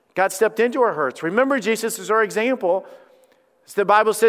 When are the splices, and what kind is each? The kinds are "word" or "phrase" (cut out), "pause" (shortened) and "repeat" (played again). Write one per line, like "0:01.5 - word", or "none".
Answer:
none